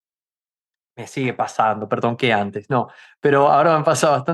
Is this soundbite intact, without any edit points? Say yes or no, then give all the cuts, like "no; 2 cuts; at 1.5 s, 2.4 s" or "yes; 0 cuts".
yes; 0 cuts